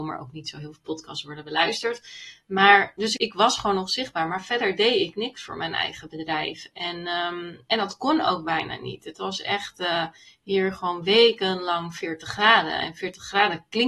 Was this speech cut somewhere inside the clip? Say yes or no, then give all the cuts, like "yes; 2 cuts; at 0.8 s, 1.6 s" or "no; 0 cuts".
yes; 1 cut; at 3.2 s